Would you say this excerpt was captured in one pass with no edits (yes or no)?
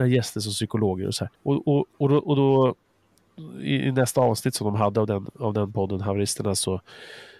no